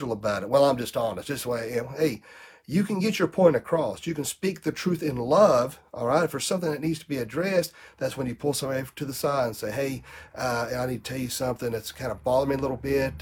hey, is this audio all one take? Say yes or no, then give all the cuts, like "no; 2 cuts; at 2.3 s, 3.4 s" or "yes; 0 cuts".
yes; 0 cuts